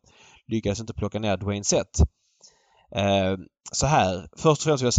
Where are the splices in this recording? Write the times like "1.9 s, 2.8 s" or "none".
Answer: none